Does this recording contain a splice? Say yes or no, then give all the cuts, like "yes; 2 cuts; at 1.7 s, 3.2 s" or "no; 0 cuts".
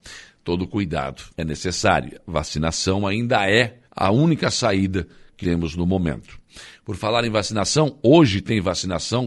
yes; 3 cuts; at 1.3 s, 3.9 s, 5.4 s